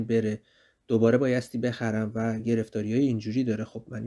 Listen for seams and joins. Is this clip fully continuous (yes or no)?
yes